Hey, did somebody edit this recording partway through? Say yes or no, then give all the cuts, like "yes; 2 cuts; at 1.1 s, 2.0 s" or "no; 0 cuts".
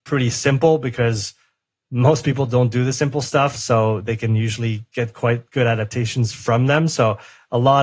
no; 0 cuts